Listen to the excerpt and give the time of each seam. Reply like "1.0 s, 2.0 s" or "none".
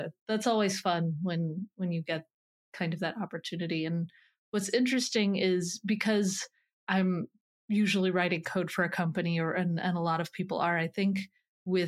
none